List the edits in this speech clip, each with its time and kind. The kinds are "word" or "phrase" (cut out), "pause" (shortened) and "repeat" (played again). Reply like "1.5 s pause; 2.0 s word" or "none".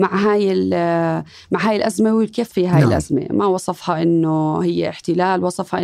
2.5 s word